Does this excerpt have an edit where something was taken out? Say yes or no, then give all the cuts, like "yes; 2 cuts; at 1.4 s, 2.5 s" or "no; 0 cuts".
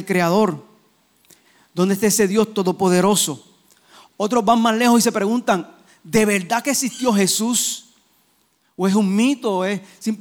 no; 0 cuts